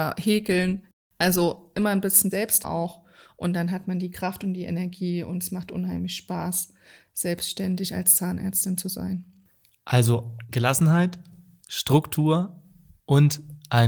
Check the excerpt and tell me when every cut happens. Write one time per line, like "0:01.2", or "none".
0:02.3
0:02.6

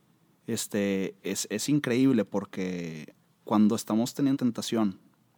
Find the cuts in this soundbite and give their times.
0:03.2
0:04.3

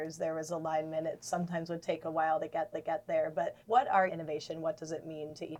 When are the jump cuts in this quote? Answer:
0:02.7
0:03.6
0:04.1

